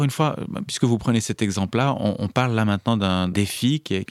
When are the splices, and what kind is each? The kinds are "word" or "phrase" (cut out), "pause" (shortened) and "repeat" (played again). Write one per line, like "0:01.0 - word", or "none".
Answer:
none